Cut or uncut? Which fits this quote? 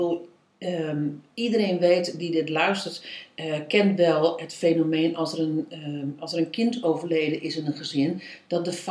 uncut